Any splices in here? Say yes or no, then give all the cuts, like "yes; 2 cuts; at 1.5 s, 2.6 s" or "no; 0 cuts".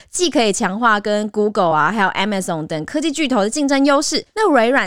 no; 0 cuts